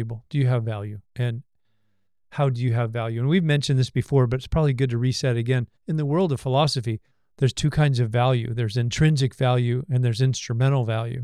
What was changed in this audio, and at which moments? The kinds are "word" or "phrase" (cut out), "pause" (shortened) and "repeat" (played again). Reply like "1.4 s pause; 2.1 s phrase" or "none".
1.0 s pause; 5.8 s pause; 7.1 s pause